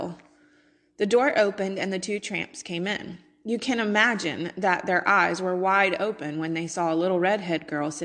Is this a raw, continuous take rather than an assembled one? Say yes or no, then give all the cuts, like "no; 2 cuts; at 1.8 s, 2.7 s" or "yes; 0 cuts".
yes; 0 cuts